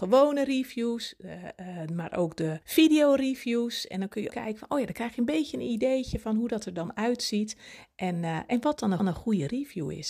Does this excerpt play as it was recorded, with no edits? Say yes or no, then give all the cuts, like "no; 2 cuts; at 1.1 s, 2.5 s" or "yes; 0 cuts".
no; 3 cuts; at 2.6 s, 4.3 s, 9.0 s